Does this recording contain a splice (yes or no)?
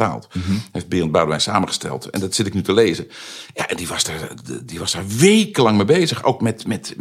no